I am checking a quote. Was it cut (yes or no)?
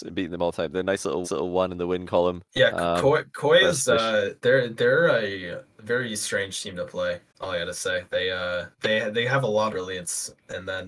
yes